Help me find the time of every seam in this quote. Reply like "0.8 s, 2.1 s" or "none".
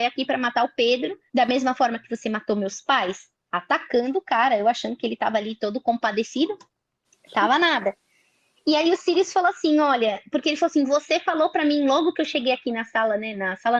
1.3 s